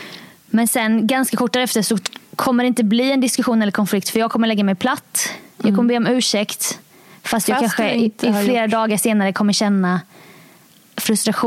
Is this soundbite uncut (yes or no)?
no